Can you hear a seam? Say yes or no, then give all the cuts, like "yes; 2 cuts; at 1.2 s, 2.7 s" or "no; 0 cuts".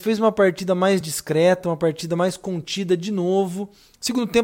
no; 0 cuts